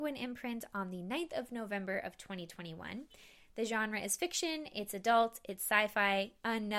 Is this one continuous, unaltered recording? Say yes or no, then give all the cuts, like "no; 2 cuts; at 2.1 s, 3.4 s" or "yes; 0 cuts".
yes; 0 cuts